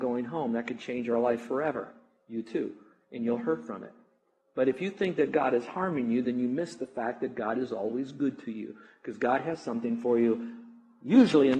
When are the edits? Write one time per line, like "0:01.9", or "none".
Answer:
none